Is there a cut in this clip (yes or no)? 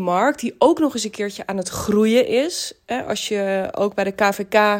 no